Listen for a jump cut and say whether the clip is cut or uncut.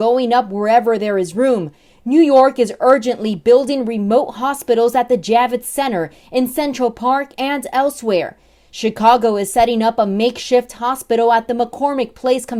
uncut